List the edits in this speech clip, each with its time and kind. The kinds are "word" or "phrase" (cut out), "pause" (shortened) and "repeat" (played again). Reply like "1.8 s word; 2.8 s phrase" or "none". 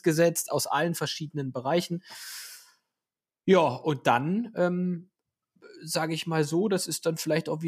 none